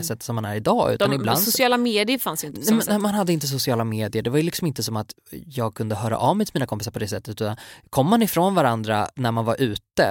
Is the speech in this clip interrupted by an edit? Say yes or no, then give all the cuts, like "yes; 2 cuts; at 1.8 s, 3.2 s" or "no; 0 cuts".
no; 0 cuts